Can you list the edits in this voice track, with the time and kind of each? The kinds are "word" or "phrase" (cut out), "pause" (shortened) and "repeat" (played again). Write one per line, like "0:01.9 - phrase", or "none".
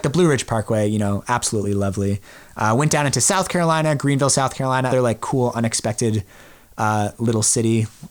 0:04.9 - word